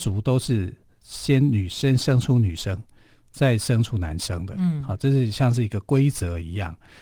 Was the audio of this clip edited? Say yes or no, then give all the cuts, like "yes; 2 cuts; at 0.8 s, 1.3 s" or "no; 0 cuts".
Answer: no; 0 cuts